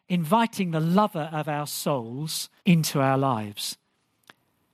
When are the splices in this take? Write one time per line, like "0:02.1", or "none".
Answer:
0:02.6

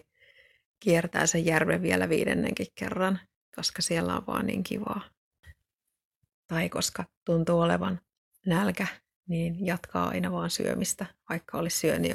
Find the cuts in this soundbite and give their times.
none

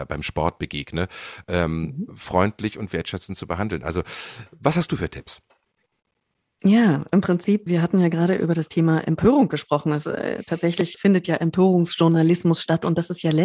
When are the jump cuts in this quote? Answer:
0:07.7
0:10.0
0:10.9

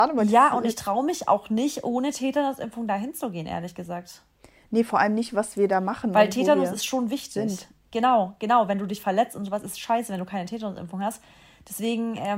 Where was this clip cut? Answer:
none

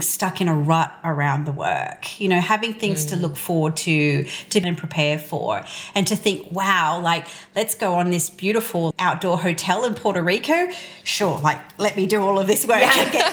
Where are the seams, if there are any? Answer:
0:04.6
0:08.9

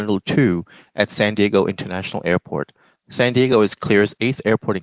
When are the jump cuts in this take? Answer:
none

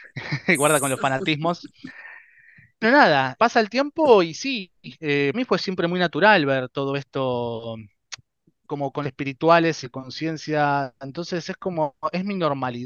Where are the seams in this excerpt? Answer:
0:02.8
0:03.4
0:05.3
0:09.0
0:09.8

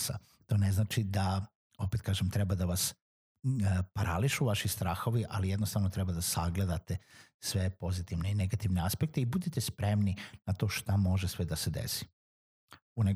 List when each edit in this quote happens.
none

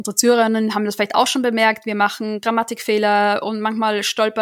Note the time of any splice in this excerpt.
none

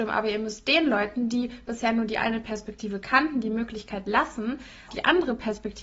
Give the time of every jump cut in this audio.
0:04.9

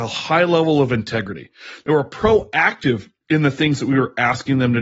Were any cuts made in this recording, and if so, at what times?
none

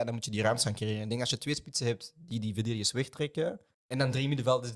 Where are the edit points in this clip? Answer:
0:03.7

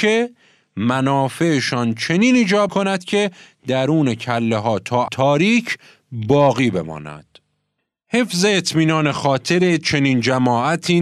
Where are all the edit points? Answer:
0:02.7
0:05.1

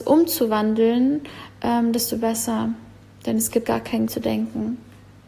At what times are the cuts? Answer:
0:03.6
0:04.1

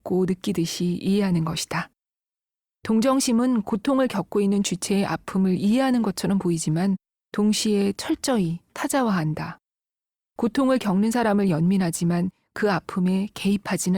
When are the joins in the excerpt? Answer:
none

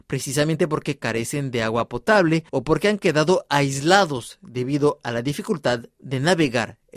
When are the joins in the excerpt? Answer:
0:02.5

